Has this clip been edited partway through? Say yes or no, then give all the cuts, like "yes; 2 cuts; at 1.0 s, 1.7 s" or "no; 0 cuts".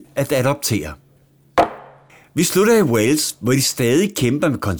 no; 0 cuts